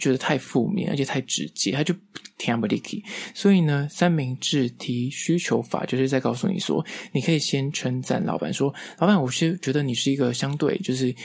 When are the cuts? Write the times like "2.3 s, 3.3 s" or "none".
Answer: none